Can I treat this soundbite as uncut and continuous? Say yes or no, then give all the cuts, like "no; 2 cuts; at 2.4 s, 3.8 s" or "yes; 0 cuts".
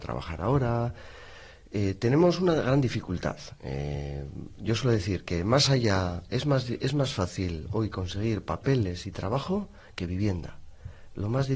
yes; 0 cuts